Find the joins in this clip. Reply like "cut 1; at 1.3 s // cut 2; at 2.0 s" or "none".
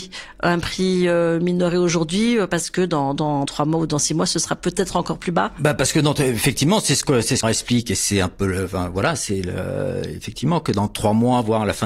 cut 1; at 3.5 s // cut 2; at 7.4 s